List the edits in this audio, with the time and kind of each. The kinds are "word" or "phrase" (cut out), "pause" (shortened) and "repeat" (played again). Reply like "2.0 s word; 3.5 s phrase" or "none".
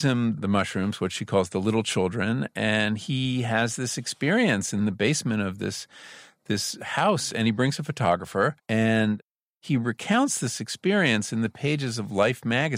8.6 s pause